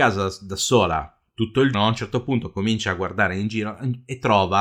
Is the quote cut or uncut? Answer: cut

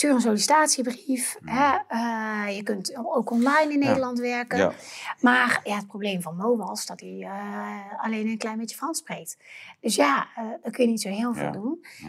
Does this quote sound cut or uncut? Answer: cut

